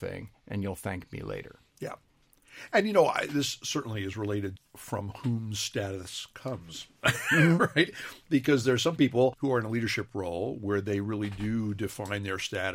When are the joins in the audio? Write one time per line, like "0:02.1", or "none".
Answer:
0:04.6